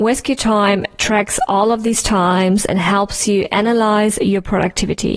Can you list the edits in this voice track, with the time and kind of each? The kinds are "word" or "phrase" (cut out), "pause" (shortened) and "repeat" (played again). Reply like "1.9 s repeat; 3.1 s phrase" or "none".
none

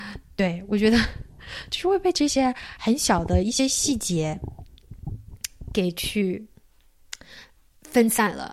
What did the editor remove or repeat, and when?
none

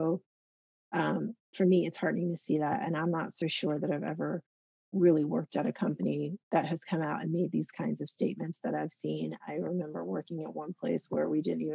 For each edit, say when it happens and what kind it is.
none

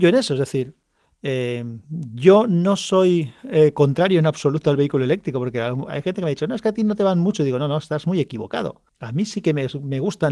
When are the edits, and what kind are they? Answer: 3.4 s pause; 8.9 s pause

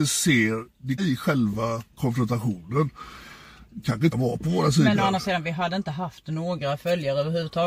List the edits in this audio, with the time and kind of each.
1.0 s word; 1.9 s pause; 4.1 s word

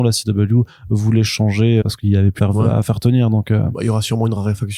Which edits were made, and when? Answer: 1.8 s word; 2.4 s phrase

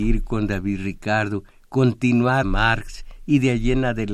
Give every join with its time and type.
2.4 s word

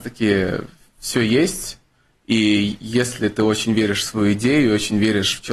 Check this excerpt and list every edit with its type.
none

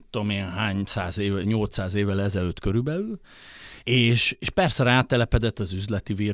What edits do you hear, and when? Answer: 3.8 s pause

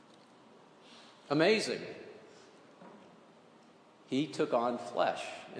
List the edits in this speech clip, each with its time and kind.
none

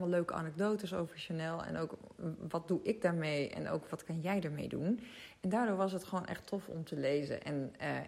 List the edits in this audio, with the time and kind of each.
none

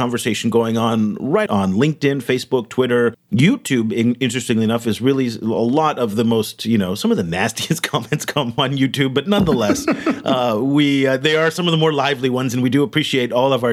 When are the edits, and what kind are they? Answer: 1.5 s phrase

